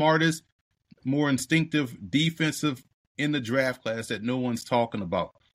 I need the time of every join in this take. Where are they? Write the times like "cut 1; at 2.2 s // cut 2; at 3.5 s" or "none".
cut 1; at 3.1 s